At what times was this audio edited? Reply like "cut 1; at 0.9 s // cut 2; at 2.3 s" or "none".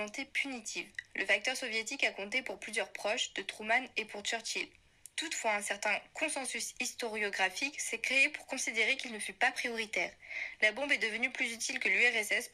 none

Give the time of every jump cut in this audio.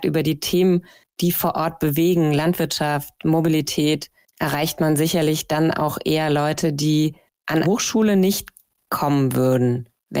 cut 1; at 7.6 s

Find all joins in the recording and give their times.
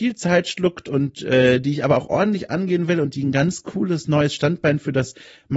none

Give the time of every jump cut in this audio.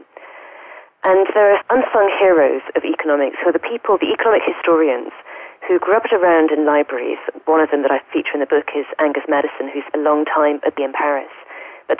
cut 1; at 1.6 s // cut 2; at 9.9 s // cut 3; at 10.8 s

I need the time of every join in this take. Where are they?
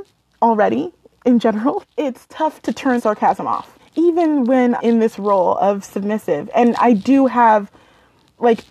cut 1; at 1.8 s // cut 2; at 3.0 s // cut 3; at 3.8 s // cut 4; at 4.8 s

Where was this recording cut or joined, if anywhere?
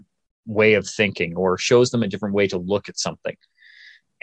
none

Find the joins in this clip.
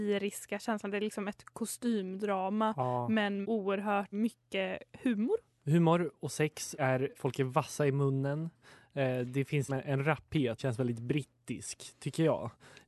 cut 1; at 3.4 s // cut 2; at 4.1 s // cut 3; at 6.8 s // cut 4; at 7.1 s // cut 5; at 9.7 s // cut 6; at 10.6 s

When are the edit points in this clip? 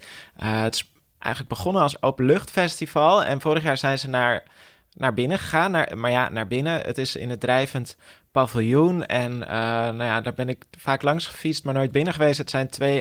none

